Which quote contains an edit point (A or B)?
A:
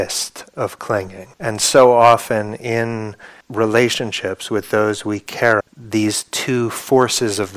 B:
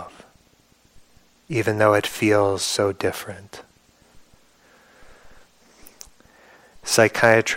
A